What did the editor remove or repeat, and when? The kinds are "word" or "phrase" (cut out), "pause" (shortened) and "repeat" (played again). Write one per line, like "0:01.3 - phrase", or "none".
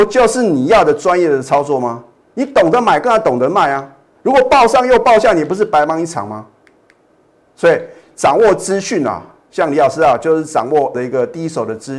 0:10.9 - word